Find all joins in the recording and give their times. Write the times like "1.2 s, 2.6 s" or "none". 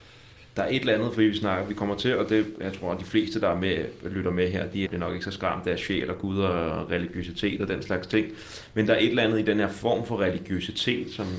4.9 s